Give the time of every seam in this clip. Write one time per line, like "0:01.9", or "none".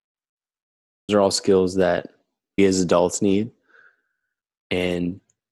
0:01.1
0:02.6